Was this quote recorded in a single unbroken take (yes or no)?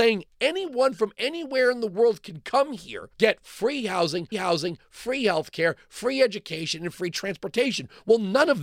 no